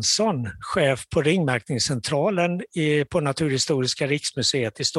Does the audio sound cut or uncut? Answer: uncut